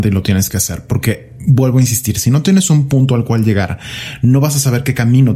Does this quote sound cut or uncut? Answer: uncut